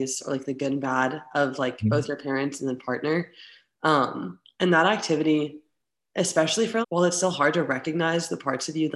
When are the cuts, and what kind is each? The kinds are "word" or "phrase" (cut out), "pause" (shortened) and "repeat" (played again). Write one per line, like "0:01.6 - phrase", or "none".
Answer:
0:06.8 - word